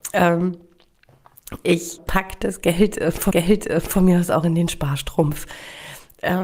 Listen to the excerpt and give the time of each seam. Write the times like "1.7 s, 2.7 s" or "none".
2.0 s, 3.3 s